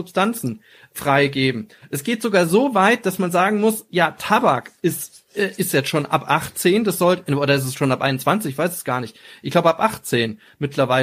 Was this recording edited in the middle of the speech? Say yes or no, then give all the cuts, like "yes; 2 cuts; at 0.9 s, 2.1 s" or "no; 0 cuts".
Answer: no; 0 cuts